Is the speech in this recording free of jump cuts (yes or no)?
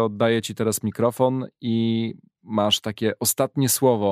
yes